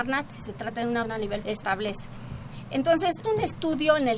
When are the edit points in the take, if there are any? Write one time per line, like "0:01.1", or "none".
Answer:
0:01.0
0:01.4
0:03.2